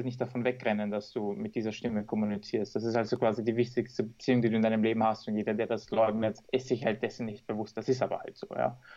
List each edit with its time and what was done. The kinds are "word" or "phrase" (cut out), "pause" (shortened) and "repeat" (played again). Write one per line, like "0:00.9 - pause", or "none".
0:06.4 - pause

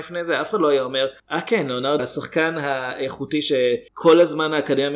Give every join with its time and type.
0:01.2 - pause
0:02.0 - word
0:03.9 - pause

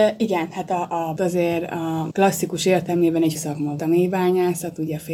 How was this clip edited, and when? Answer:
0:01.2 - word
0:02.1 - word
0:03.3 - word
0:03.8 - word

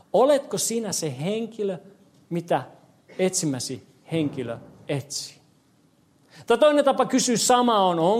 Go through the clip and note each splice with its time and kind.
none

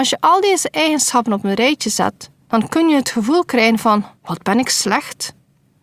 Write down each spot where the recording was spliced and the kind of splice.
0:02.4 - pause
0:04.2 - pause

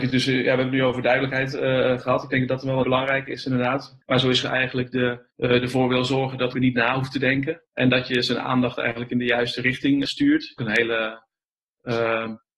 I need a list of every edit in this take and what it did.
0:02.8 - word
0:04.0 - pause
0:04.4 - phrase
0:05.3 - pause
0:06.5 - phrase
0:07.7 - pause
0:10.1 - word
0:10.6 - phrase

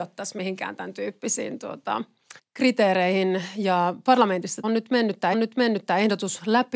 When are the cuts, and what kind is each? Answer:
0:02.4 - pause
0:04.6 - word
0:05.3 - repeat

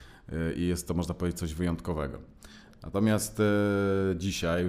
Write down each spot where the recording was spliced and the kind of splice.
none

